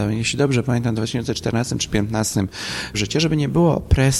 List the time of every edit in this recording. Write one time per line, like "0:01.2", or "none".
0:02.9